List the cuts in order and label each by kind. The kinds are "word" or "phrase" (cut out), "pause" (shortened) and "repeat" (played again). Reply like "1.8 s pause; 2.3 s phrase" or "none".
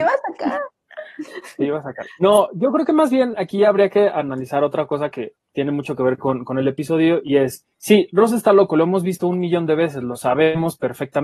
5.4 s pause; 7.7 s pause